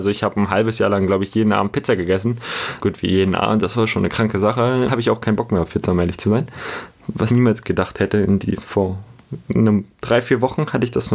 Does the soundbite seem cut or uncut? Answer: cut